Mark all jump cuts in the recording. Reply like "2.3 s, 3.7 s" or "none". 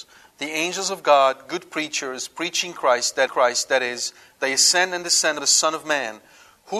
3.3 s, 5.4 s